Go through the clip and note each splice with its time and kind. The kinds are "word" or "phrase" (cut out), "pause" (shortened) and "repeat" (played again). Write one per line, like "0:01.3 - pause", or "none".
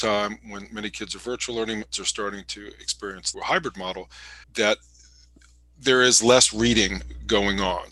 0:01.9 - phrase
0:03.3 - phrase
0:04.4 - pause